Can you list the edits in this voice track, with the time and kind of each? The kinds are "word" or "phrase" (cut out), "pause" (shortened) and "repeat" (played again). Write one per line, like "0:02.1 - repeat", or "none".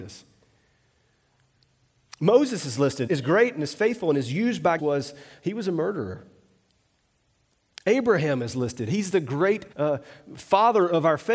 0:03.1 - word
0:04.8 - phrase
0:09.7 - pause